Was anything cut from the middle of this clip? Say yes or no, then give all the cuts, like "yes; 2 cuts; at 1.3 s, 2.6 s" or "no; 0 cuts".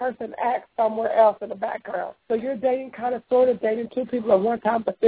yes; 1 cut; at 2.2 s